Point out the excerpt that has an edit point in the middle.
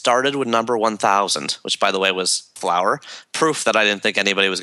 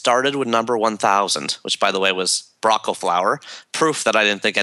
first; 1 cut; at 2.6 s

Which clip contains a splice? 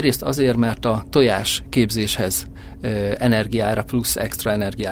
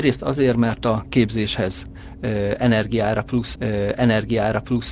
second; 2 cuts; at 1.0 s, 3.6 s

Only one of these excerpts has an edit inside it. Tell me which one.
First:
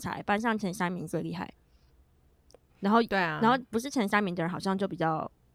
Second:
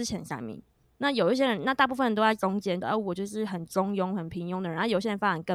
second; 1 cut; at 2.8 s

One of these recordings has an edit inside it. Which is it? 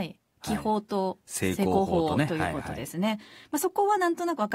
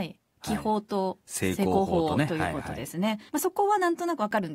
second; 1 cut; at 3.3 s

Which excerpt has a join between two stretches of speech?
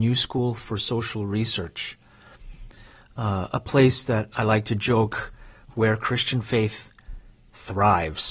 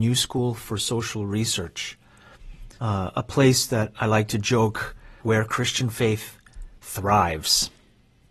second; 3 cuts; at 2.8 s, 5.2 s, 6.8 s

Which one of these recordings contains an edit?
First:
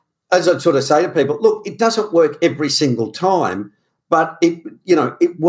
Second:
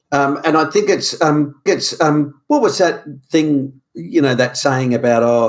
second; 1 cut; at 1.7 s

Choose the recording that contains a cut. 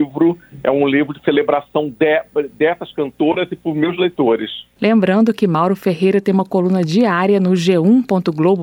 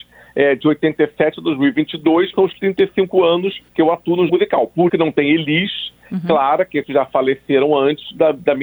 second; 5 cuts; at 2.3 s, 3.7 s, 4.3 s, 4.9 s, 6.8 s

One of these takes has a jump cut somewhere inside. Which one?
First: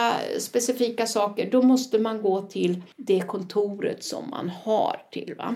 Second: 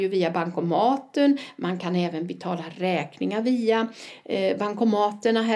first; 1 cut; at 2.9 s

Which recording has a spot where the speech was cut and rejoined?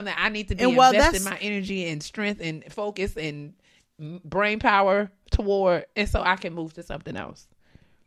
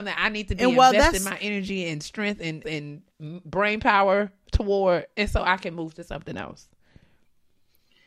second; 2 cuts; at 2.6 s, 3.1 s

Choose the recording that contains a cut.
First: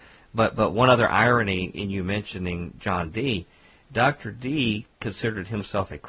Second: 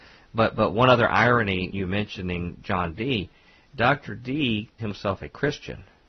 second; 2 cuts; at 1.7 s, 4.8 s

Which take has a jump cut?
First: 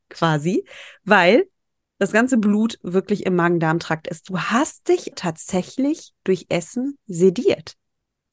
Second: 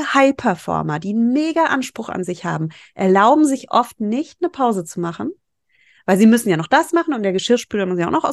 first; 1 cut; at 5.1 s

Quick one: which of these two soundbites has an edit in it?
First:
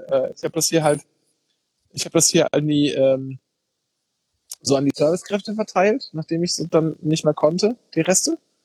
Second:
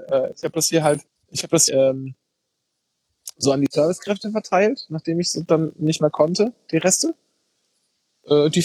second; 2 cuts; at 1.1 s, 1.7 s

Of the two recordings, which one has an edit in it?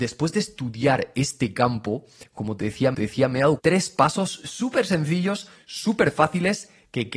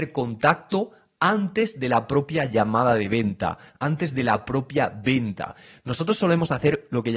first; 2 cuts; at 2.9 s, 3.6 s

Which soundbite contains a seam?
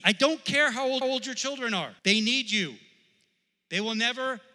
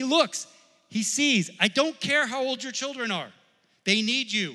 first; 2 cuts; at 1.0 s, 2.0 s

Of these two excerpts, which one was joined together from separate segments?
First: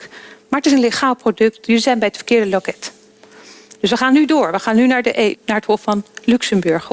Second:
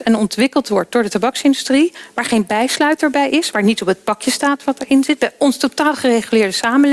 first; 1 cut; at 5.3 s

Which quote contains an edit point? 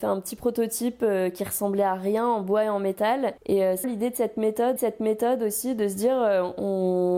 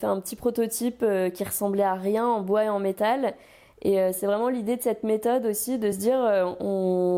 first; 3 cuts; at 3.4 s, 3.8 s, 4.8 s

